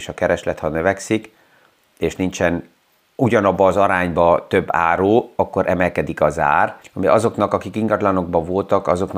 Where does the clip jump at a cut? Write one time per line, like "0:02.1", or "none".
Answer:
0:06.8